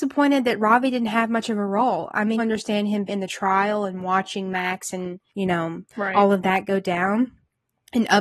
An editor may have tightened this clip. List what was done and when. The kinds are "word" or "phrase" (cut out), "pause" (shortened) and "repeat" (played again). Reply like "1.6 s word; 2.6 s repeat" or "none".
2.4 s phrase; 3.1 s word; 5.3 s pause; 5.9 s pause